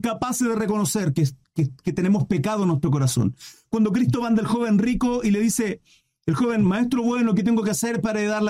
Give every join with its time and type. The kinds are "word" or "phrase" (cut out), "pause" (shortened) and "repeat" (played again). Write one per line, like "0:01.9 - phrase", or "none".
none